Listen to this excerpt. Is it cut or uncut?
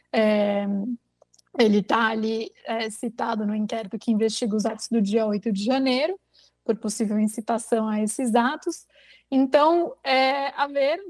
uncut